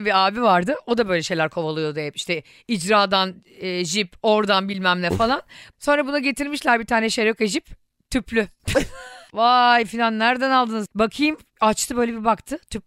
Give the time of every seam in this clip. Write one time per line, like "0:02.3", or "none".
none